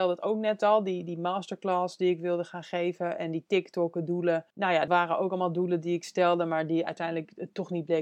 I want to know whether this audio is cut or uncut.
cut